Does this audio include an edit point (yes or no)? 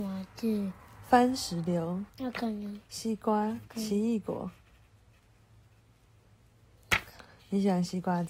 yes